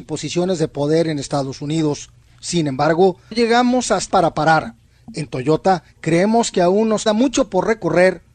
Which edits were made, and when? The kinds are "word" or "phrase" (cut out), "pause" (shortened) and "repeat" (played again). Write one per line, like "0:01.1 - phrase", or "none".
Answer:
0:03.3 - word
0:04.1 - word
0:07.1 - word

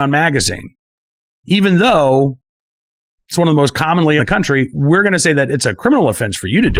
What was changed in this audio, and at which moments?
0:04.2 - phrase

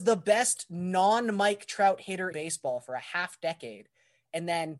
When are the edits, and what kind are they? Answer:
0:02.3 - word

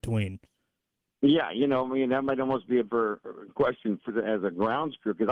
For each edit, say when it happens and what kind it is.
0:02.9 - word
0:04.1 - word

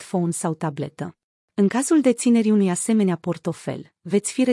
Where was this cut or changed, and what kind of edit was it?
0:01.3 - pause

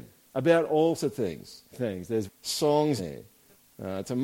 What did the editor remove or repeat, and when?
0:01.0 - word
0:01.7 - word
0:02.3 - word
0:03.0 - word

